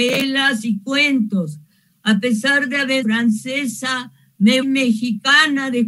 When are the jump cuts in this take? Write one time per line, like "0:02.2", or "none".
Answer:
0:03.0
0:04.6